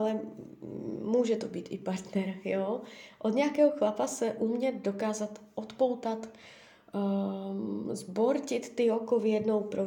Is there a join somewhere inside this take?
no; 0 cuts

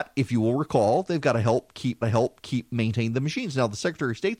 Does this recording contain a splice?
yes; 1 cut; at 2.0 s

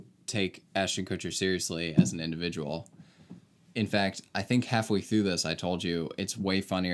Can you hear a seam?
no; 0 cuts

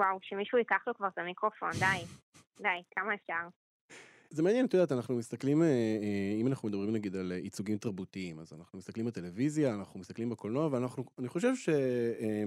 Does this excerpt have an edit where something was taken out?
no; 0 cuts

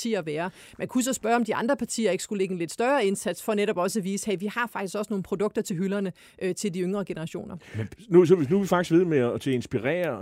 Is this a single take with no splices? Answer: yes; 0 cuts

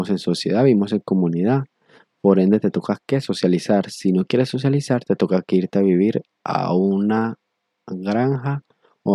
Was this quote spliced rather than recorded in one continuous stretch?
no; 0 cuts

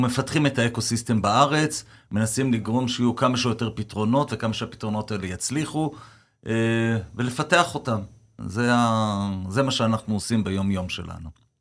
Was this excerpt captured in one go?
yes; 0 cuts

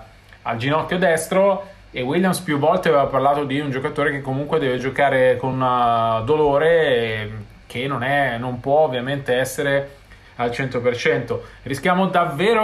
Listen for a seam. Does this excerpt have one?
no; 0 cuts

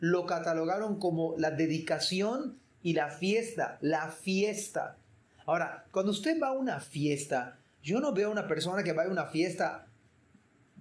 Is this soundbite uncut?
yes; 0 cuts

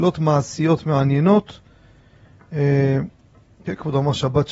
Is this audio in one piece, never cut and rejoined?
yes; 0 cuts

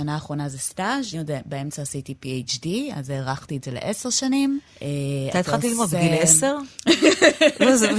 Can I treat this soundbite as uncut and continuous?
no; 1 cut; at 1.1 s

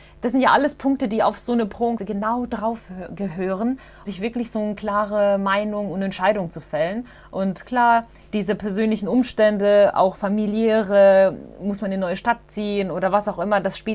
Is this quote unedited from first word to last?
no; 2 cuts; at 2.0 s, 4.1 s

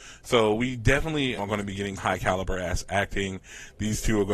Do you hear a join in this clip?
yes; 2 cuts; at 1.4 s, 2.0 s

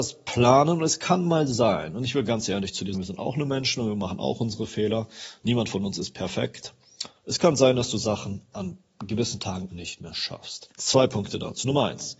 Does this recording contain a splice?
yes; 4 cuts; at 2.9 s, 7.2 s, 9.7 s, 10.7 s

